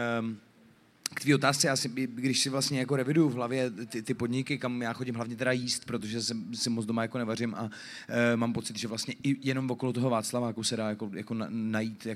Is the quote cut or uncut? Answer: uncut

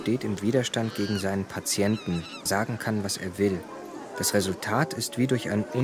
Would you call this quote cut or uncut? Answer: cut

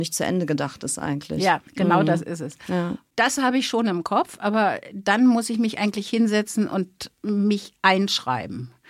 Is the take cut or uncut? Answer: cut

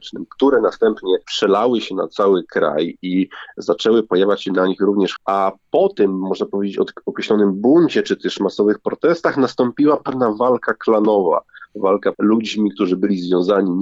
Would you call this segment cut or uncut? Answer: cut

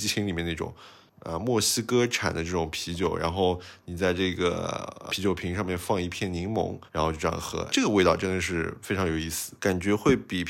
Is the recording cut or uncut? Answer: cut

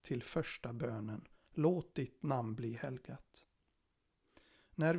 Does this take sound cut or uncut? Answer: uncut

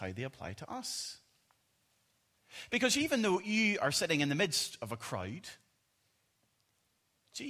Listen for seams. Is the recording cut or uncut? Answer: uncut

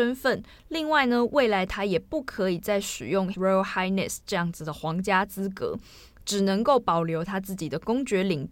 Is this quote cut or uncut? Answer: cut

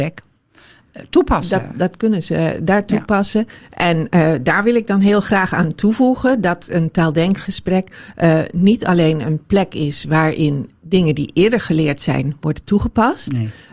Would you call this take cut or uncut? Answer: uncut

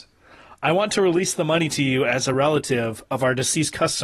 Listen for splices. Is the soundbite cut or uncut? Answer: uncut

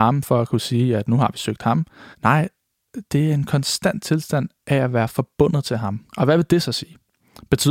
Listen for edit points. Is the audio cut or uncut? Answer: cut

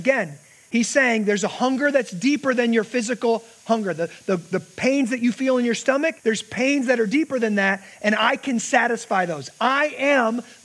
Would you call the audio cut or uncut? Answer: cut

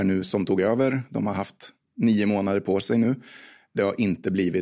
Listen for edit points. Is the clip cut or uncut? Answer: uncut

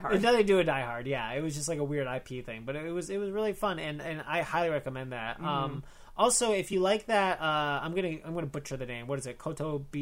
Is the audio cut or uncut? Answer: uncut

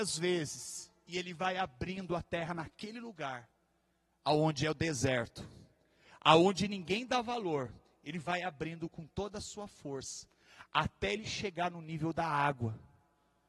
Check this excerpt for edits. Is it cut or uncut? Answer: uncut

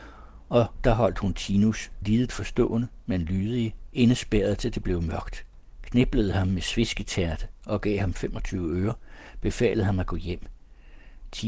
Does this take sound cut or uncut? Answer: cut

